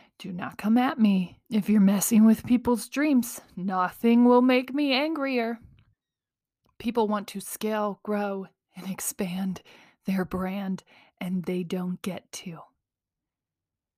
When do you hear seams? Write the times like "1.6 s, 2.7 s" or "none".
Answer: 1.4 s, 5.9 s